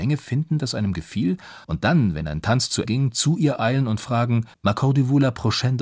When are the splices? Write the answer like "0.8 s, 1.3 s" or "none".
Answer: 1.6 s, 2.9 s, 4.5 s